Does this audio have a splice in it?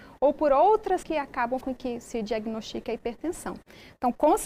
yes; 3 cuts; at 1.0 s, 1.6 s, 2.0 s

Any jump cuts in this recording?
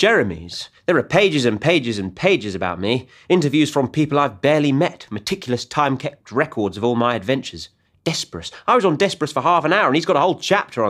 no; 0 cuts

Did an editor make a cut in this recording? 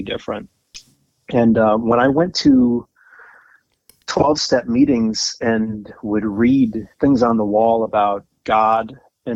yes; 1 cut; at 6.9 s

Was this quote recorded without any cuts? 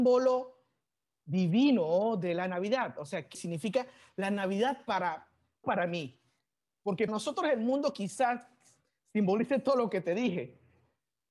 no; 3 cuts; at 3.3 s, 5.6 s, 7.1 s

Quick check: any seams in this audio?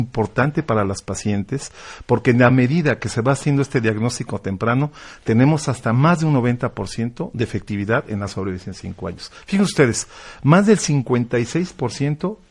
no; 0 cuts

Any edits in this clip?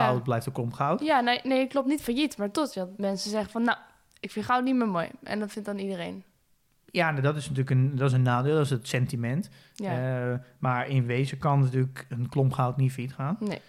no; 0 cuts

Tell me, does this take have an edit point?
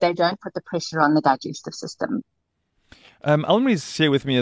no; 0 cuts

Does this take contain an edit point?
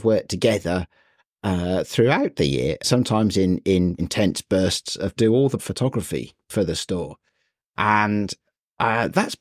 yes; 4 cuts; at 2.8 s, 4.0 s, 5.2 s, 5.6 s

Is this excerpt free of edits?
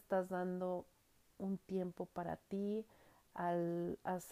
yes; 0 cuts

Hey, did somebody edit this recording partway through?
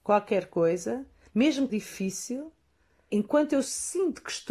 yes; 2 cuts; at 1.7 s, 3.1 s

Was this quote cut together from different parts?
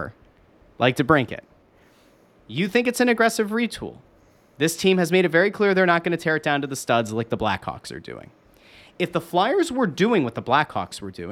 no; 0 cuts

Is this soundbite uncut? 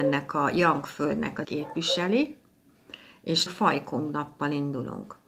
no; 2 cuts; at 1.4 s, 3.5 s

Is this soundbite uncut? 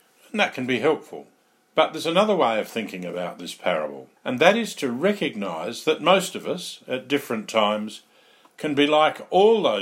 no; 2 cuts; at 1.4 s, 4.2 s

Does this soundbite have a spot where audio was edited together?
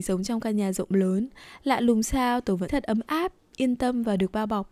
yes; 1 cut; at 2.7 s

